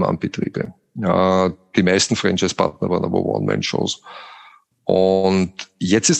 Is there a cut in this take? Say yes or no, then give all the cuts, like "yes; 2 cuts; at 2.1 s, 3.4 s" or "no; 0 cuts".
no; 0 cuts